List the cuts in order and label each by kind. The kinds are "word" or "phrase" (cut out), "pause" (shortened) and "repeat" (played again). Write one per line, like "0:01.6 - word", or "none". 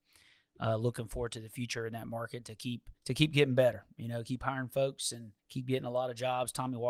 0:03.0 - pause
0:05.4 - pause